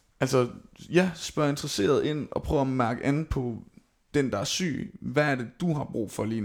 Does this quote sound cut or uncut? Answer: uncut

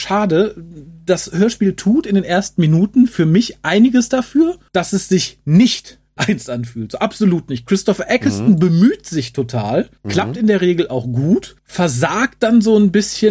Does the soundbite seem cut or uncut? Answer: cut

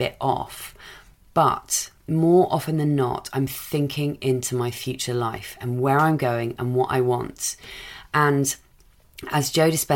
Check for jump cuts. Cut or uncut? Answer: uncut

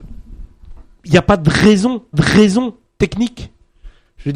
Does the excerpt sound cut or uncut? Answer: cut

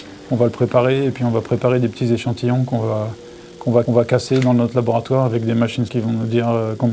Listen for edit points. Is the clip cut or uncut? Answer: cut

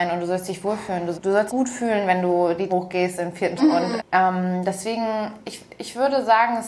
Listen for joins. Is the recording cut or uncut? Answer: cut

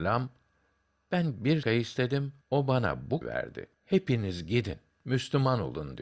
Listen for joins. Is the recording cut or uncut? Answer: cut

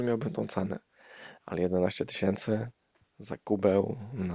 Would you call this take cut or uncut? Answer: uncut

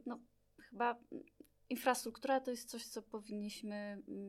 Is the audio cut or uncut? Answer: uncut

